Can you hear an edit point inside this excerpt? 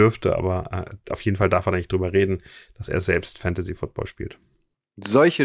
no; 0 cuts

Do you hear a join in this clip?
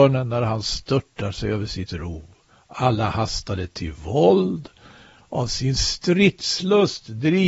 no; 0 cuts

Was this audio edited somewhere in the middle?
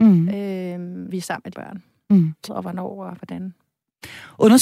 yes; 3 cuts; at 1.1 s, 1.5 s, 2.5 s

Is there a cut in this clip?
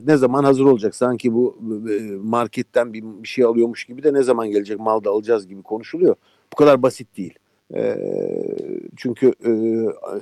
yes; 1 cut; at 7.6 s

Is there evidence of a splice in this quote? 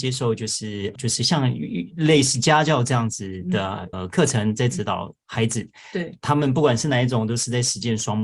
yes; 2 cuts; at 1.0 s, 3.9 s

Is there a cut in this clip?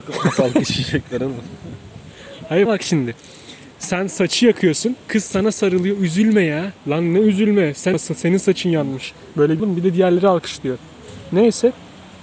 yes; 6 cuts; at 2.7 s, 3.7 s, 5.0 s, 6.8 s, 7.9 s, 9.6 s

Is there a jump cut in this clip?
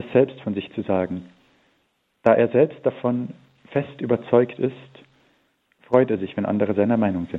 no; 0 cuts

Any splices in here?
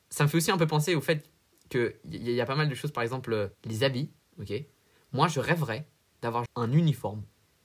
yes; 2 cuts; at 3.5 s, 6.5 s

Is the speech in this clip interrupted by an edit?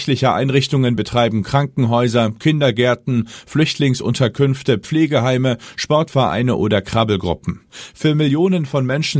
no; 0 cuts

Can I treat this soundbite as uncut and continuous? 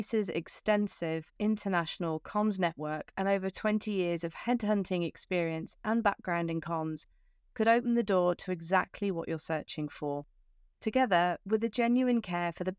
yes; 0 cuts

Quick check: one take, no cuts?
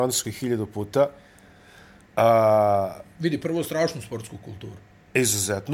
yes; 0 cuts

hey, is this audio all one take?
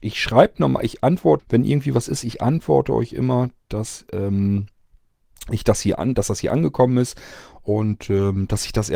no; 1 cut; at 1.4 s

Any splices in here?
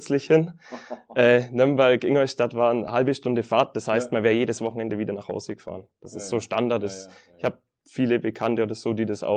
no; 0 cuts

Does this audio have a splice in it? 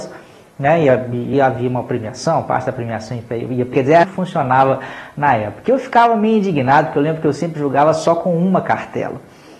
yes; 3 cuts; at 1.3 s, 3.7 s, 4.0 s

